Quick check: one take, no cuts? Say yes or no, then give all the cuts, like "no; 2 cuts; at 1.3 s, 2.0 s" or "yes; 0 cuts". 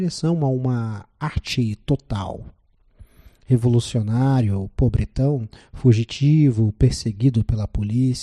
yes; 0 cuts